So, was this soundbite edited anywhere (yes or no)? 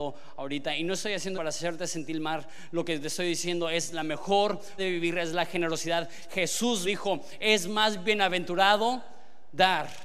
yes